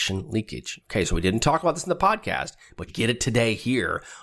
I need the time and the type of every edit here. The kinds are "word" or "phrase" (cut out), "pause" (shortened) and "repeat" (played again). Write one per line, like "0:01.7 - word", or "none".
0:02.9 - word